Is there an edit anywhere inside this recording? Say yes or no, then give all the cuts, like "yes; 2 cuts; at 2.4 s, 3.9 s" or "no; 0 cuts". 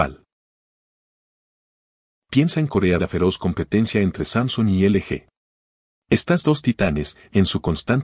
yes; 1 cut; at 3.0 s